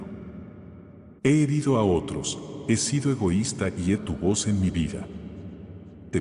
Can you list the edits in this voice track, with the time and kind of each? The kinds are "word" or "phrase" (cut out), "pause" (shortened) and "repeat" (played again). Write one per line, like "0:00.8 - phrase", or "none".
0:01.2 - pause
0:04.0 - word